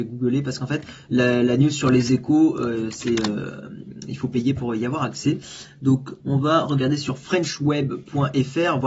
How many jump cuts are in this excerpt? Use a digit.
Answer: 0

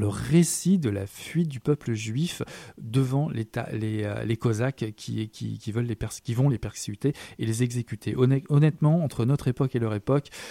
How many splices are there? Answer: 0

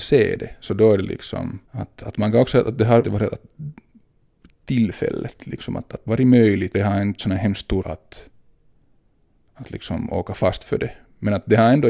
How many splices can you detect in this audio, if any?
6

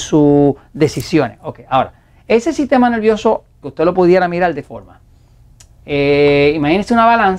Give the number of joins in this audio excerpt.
2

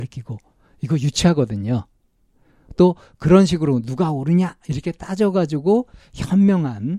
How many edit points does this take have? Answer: 0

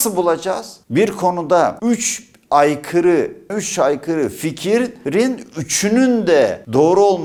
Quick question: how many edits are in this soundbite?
1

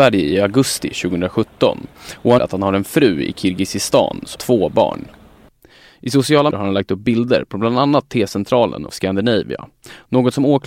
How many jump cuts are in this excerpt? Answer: 4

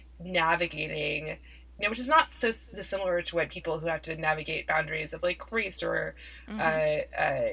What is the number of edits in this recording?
0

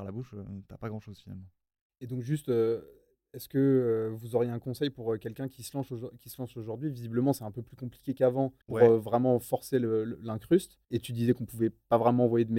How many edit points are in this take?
2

